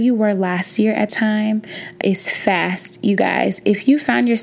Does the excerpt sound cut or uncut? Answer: cut